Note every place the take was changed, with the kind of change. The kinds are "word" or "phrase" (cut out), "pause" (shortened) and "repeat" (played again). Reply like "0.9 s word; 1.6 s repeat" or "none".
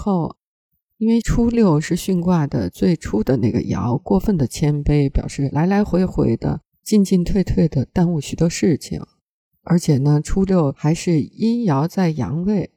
none